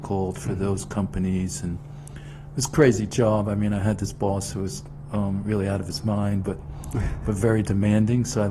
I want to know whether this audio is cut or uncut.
uncut